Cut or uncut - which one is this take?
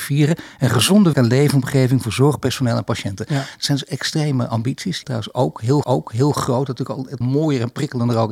cut